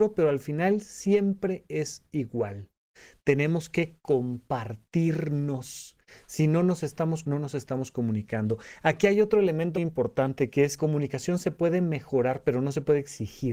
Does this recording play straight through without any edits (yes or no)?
no